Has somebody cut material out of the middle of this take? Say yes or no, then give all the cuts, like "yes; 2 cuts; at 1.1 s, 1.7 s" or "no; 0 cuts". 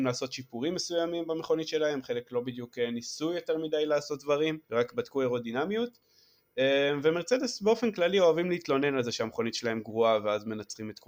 yes; 1 cut; at 4.6 s